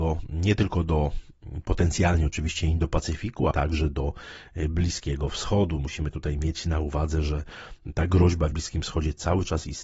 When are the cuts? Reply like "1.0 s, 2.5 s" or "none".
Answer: 3.5 s, 8.5 s